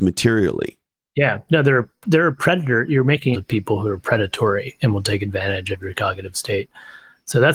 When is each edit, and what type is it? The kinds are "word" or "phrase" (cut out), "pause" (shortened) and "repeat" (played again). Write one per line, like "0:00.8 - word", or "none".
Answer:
0:03.3 - phrase